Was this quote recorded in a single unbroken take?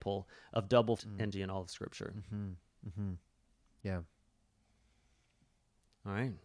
no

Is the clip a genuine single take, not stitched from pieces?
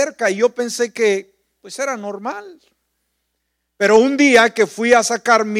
yes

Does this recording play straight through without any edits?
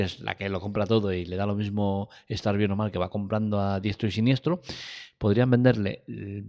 yes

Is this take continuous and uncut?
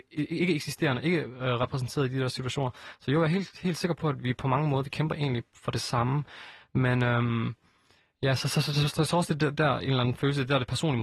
no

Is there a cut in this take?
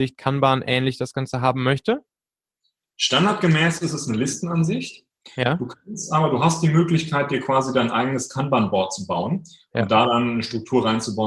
no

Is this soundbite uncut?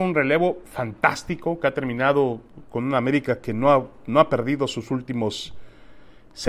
yes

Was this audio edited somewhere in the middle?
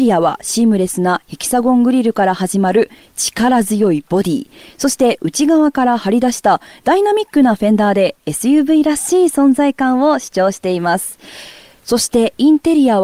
no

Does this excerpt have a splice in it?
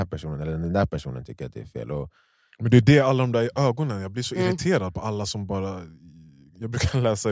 no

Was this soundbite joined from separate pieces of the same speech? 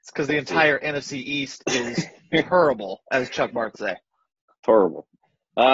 yes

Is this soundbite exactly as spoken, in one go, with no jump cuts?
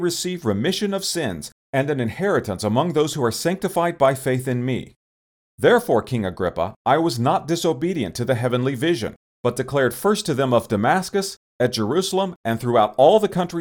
yes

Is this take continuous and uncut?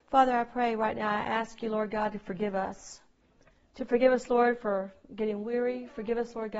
yes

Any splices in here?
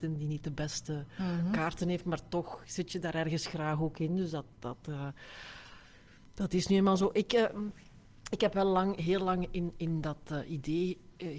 no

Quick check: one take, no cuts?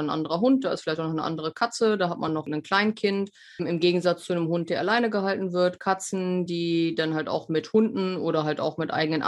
yes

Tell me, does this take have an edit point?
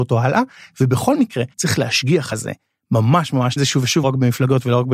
yes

